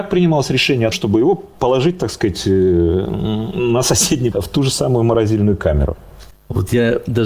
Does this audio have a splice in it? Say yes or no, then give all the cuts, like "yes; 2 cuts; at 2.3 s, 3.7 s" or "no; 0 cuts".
yes; 2 cuts; at 0.9 s, 4.3 s